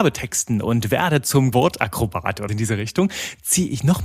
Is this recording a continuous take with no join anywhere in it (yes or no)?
no